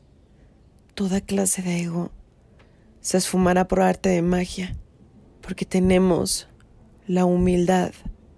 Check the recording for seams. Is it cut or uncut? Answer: cut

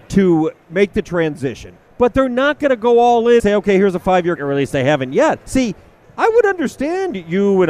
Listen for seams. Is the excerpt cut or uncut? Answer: cut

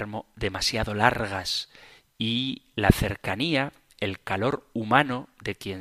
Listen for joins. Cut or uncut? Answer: uncut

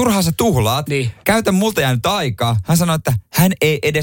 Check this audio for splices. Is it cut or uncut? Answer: cut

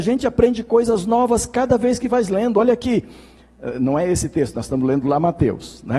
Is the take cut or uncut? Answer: uncut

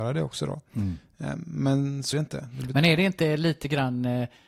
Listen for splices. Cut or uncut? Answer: cut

